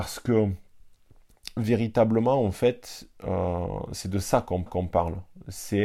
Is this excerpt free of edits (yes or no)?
no